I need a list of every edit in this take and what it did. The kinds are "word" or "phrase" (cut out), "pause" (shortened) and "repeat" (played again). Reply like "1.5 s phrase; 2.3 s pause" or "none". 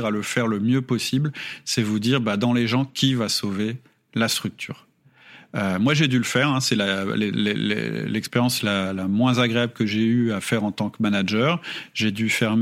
none